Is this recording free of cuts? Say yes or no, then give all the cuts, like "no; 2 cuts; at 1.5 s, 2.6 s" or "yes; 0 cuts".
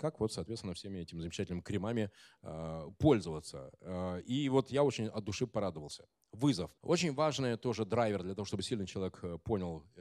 no; 1 cut; at 6.8 s